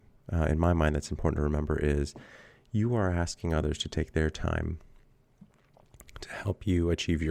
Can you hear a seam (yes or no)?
no